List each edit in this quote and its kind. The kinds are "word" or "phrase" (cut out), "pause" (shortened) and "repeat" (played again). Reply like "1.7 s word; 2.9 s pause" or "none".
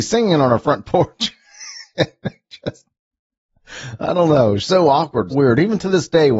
5.3 s word